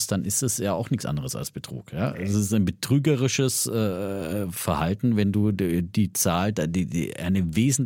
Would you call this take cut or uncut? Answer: uncut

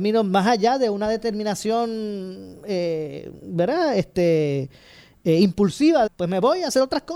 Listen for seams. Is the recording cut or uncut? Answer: cut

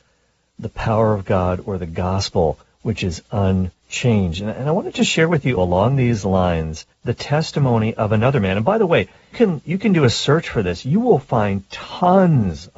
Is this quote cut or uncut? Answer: cut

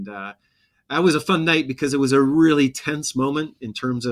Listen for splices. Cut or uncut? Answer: uncut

